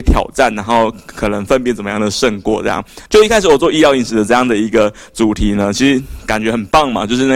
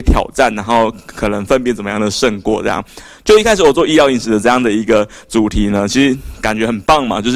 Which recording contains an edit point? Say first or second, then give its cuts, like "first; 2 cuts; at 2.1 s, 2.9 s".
first; 1 cut; at 3.1 s